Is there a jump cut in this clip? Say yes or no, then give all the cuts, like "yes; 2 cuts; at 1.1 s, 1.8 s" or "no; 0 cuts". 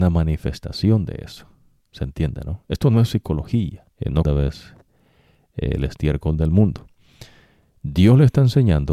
yes; 3 cuts; at 1.8 s, 3.9 s, 4.2 s